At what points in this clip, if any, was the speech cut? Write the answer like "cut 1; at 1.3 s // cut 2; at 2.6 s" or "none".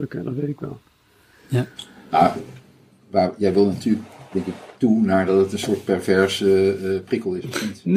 none